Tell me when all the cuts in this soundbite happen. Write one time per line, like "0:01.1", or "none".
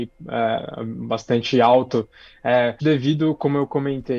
0:02.8